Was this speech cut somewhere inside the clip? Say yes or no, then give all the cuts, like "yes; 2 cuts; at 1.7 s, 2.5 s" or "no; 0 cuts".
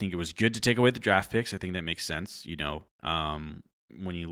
yes; 1 cut; at 2.9 s